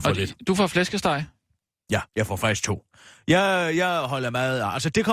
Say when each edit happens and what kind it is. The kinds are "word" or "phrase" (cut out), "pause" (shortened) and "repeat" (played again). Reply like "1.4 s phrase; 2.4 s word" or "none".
2.1 s pause